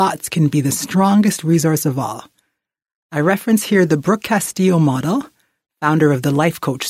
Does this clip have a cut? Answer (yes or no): no